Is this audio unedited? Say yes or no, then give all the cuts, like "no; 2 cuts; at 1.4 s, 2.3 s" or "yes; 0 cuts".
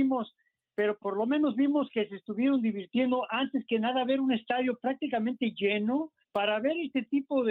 no; 2 cuts; at 1.0 s, 6.2 s